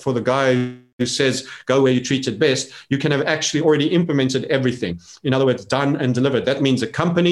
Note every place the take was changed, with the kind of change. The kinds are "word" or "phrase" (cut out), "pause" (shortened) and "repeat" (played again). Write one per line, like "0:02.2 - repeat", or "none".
none